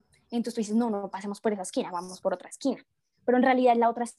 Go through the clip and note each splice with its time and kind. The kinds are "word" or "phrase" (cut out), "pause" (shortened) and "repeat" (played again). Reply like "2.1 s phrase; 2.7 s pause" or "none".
none